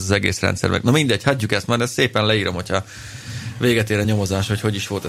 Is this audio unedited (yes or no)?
yes